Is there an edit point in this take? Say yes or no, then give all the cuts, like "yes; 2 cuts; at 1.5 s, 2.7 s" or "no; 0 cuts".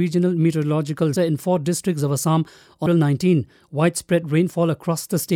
yes; 2 cuts; at 1.2 s, 2.9 s